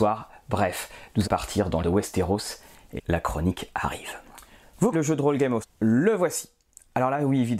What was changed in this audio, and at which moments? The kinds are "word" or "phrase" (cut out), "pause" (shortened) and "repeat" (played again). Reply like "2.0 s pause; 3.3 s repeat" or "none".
1.2 s word; 1.8 s word; 3.0 s word; 4.9 s word; 5.6 s word